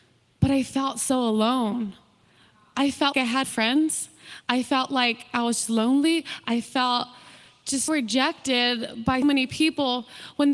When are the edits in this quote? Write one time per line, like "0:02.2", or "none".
0:03.1
0:03.4
0:07.9
0:09.2